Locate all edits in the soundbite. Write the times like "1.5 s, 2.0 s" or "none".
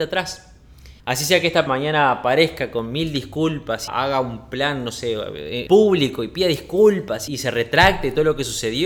1.0 s, 1.7 s, 3.9 s, 5.7 s, 7.3 s